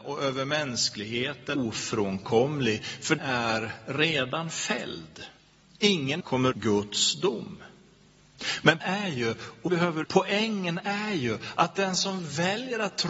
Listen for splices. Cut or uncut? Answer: cut